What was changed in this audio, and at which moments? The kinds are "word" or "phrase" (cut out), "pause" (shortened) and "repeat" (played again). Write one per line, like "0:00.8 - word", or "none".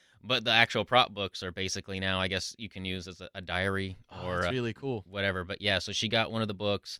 0:04.5 - word